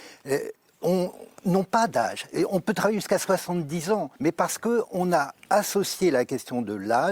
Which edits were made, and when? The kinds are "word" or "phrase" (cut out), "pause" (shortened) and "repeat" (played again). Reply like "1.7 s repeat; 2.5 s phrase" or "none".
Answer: 4.2 s pause